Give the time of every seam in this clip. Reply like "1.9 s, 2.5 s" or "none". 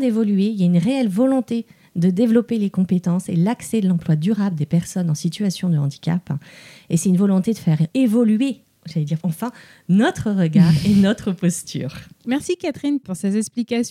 9.2 s